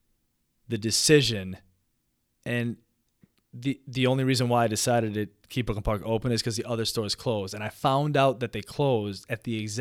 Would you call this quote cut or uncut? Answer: cut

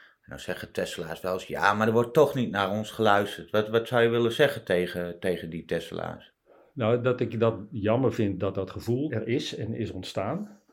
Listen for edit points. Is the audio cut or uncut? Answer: uncut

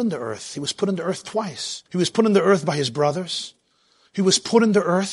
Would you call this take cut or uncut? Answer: cut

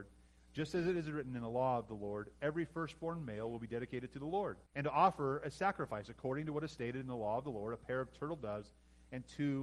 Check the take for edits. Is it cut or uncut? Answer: cut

